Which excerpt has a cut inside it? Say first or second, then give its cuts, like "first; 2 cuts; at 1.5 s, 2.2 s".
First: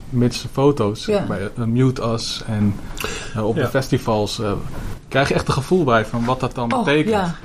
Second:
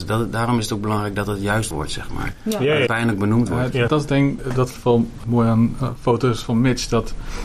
second; 6 cuts; at 1.7 s, 2.9 s, 3.9 s, 4.4 s, 4.8 s, 5.2 s